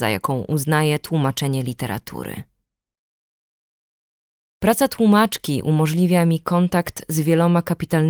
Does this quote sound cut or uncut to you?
uncut